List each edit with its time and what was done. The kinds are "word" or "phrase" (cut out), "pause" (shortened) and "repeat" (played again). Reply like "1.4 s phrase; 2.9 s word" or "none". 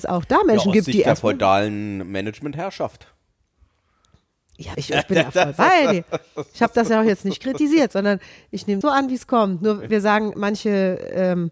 4.7 s word; 8.8 s word; 9.9 s word